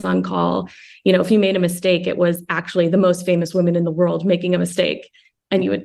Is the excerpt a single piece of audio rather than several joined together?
yes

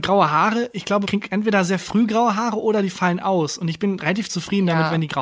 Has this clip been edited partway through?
yes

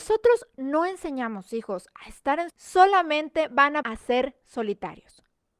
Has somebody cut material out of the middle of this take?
yes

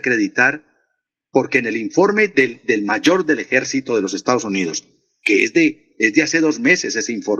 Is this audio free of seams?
yes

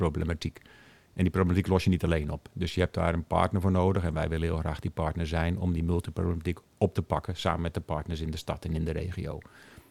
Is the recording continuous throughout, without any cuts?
yes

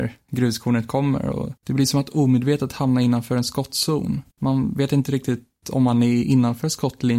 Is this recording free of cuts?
no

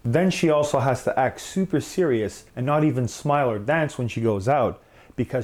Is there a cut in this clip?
yes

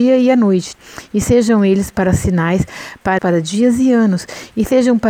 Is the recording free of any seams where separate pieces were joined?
no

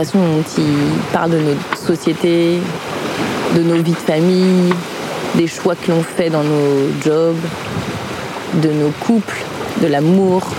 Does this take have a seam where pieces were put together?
no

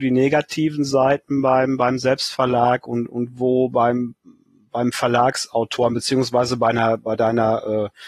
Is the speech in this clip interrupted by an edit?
no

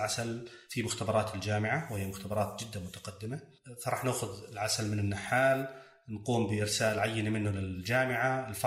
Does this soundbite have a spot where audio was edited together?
no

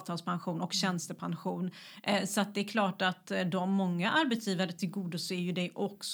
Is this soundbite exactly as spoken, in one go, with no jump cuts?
yes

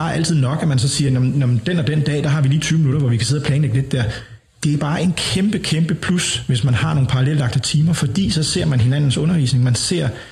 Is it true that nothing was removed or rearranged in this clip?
yes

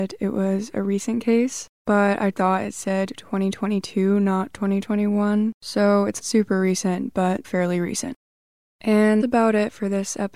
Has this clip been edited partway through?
yes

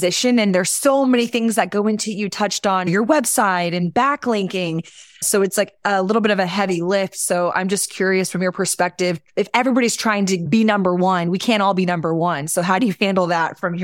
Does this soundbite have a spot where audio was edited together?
no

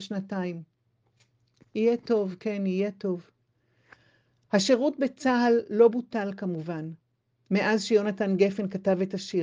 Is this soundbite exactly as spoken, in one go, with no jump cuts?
yes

